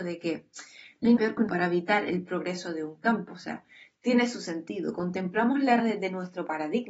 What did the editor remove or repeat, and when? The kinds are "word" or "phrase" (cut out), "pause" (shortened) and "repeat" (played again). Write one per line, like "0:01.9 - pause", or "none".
0:01.2 - word
0:01.5 - word
0:05.8 - word